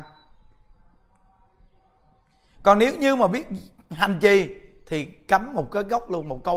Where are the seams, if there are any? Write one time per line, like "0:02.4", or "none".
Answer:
none

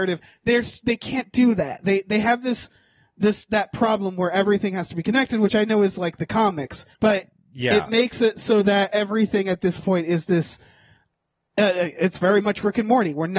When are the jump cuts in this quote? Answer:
0:06.9

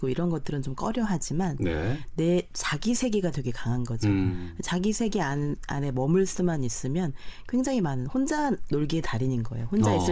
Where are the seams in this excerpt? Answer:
none

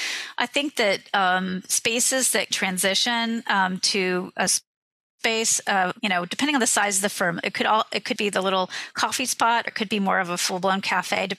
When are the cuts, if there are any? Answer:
0:02.5
0:04.5
0:06.0
0:08.2
0:09.7

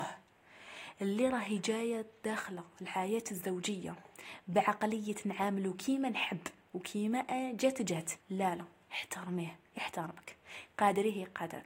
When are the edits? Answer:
0:08.2

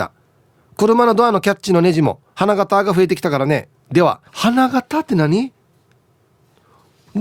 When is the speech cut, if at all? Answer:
0:03.8
0:04.3

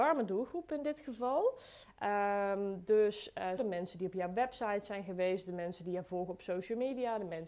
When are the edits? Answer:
0:03.6

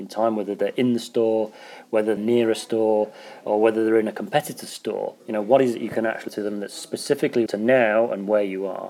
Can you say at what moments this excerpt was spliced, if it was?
0:02.2
0:05.2
0:06.3
0:07.5

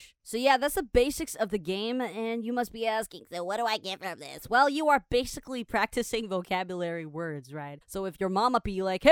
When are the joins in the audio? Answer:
0:07.8

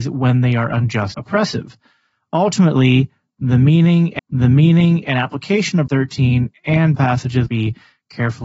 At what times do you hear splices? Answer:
0:01.1
0:04.2
0:05.9
0:07.0
0:07.5

